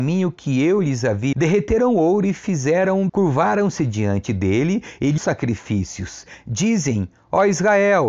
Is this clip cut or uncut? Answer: cut